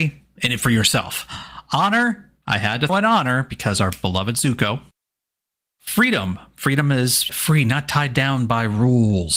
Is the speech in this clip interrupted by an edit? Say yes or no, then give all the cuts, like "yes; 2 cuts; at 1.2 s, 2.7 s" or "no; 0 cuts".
yes; 2 cuts; at 2.9 s, 7.3 s